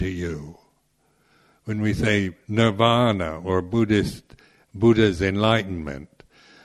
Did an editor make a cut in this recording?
no; 0 cuts

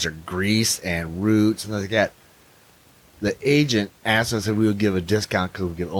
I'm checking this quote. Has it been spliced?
no; 0 cuts

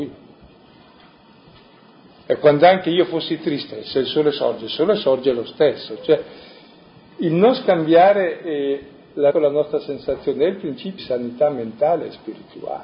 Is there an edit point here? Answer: yes; 2 cuts; at 9.3 s, 11.0 s

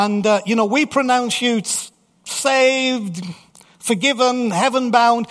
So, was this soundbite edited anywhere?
no; 0 cuts

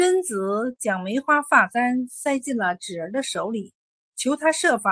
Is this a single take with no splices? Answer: no; 1 cut; at 4.0 s

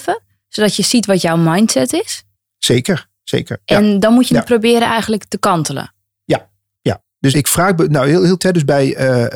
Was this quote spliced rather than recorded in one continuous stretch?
yes; 2 cuts; at 7.3 s, 8.4 s

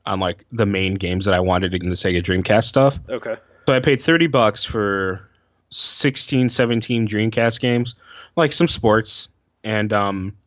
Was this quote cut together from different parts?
yes; 2 cuts; at 1.8 s, 3.7 s

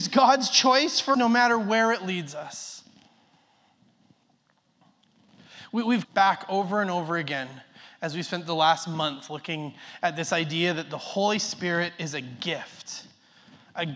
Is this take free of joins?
no; 2 cuts; at 1.1 s, 6.0 s

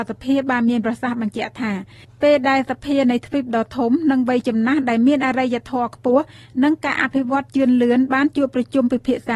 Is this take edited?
no; 0 cuts

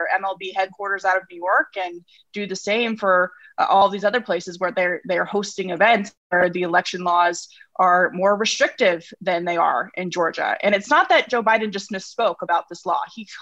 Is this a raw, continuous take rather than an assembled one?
yes; 0 cuts

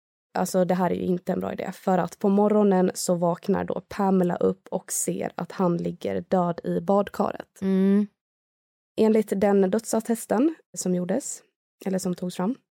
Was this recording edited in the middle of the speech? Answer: no; 0 cuts

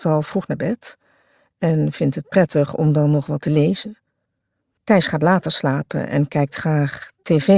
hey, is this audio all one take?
yes; 0 cuts

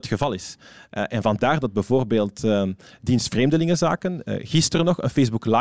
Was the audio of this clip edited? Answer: no; 0 cuts

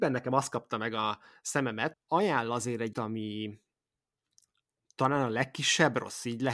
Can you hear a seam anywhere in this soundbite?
yes; 2 cuts; at 1.9 s, 2.9 s

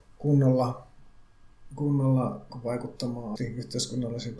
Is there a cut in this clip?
yes; 2 cuts; at 2.5 s, 3.4 s

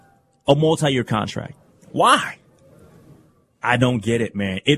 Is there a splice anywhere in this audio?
yes; 1 cut; at 1.6 s

